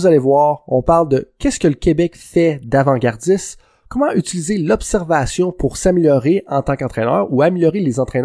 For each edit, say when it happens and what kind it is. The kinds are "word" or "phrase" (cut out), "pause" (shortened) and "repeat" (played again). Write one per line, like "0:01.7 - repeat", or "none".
none